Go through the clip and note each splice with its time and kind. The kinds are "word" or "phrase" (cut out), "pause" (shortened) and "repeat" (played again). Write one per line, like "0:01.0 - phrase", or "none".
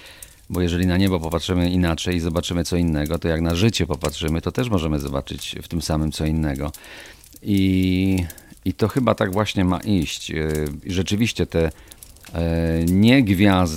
none